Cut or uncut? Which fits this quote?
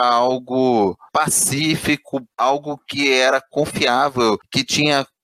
cut